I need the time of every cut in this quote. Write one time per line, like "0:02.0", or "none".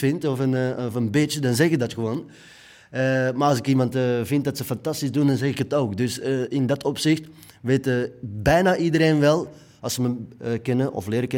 none